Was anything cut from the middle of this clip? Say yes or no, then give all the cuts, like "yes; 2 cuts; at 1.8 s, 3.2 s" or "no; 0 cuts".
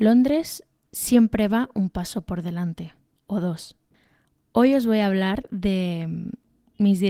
no; 0 cuts